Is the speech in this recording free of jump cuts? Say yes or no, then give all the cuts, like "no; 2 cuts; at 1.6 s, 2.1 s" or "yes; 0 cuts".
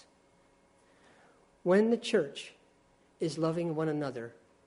yes; 0 cuts